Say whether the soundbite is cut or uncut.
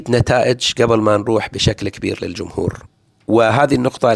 uncut